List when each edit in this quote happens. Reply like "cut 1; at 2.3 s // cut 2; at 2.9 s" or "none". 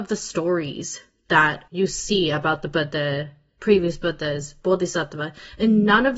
cut 1; at 1.7 s